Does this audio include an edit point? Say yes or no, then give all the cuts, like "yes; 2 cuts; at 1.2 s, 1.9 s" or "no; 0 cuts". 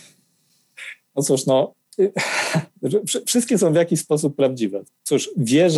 no; 0 cuts